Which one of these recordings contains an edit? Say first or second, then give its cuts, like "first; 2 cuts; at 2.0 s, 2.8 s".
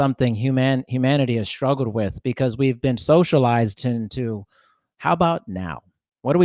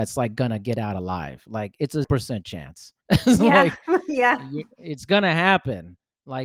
second; 2 cuts; at 2.0 s, 3.0 s